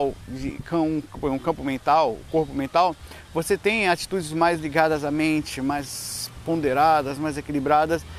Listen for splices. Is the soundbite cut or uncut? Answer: uncut